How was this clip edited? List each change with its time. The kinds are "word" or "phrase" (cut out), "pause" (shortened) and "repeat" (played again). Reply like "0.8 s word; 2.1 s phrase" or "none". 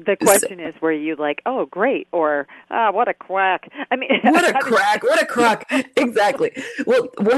none